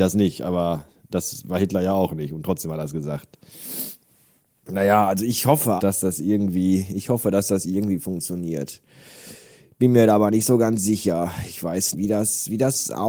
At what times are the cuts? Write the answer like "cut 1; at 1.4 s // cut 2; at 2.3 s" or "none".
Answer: cut 1; at 5.8 s // cut 2; at 11.9 s